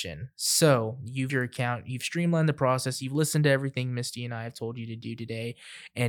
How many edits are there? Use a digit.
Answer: 1